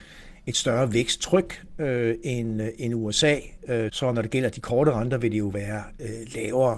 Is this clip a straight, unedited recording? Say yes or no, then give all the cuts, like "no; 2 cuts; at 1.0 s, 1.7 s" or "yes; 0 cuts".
no; 1 cut; at 3.9 s